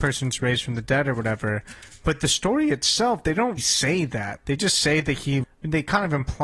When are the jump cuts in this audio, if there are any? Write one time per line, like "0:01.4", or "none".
0:03.6
0:05.4